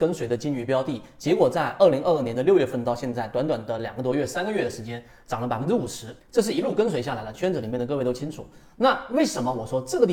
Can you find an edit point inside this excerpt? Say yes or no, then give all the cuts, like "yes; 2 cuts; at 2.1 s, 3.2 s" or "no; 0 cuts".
yes; 1 cut; at 6.2 s